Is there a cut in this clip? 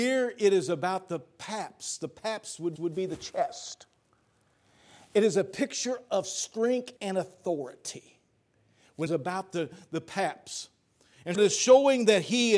yes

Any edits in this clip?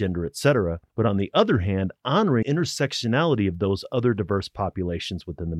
yes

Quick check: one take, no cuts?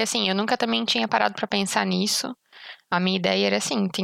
yes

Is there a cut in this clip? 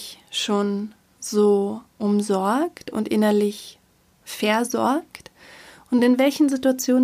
no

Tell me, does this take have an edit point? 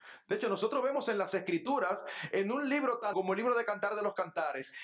yes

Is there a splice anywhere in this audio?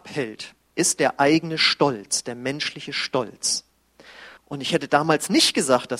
yes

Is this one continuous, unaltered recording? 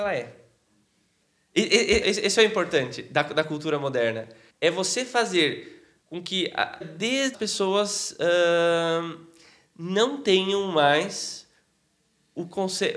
no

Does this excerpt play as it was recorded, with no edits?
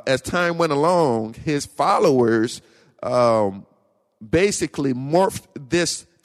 yes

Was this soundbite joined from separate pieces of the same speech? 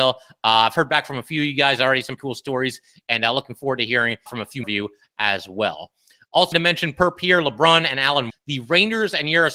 yes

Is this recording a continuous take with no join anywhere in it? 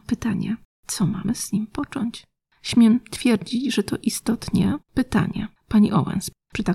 no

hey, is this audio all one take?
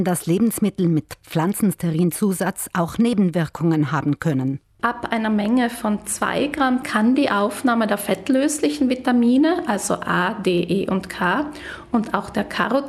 no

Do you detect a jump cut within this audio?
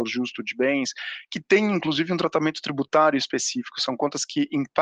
no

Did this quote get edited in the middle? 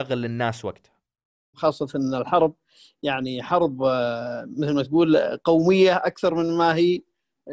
no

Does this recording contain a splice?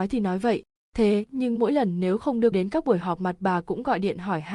yes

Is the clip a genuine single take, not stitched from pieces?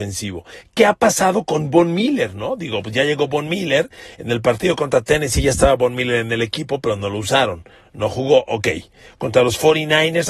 yes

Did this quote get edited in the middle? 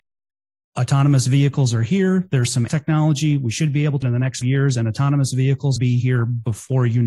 yes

